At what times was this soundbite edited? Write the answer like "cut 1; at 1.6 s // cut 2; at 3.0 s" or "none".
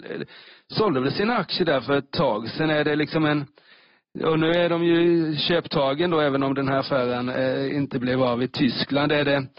none